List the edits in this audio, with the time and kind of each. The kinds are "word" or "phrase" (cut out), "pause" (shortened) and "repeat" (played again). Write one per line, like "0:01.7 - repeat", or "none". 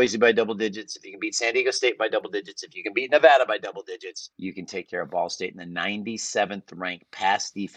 0:04.3 - pause